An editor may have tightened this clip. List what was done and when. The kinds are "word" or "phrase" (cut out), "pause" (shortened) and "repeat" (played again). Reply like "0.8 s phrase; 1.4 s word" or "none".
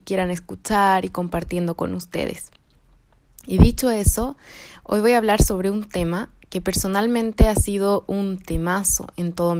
none